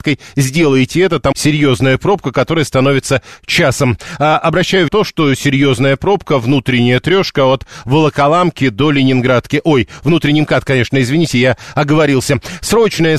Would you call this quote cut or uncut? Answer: cut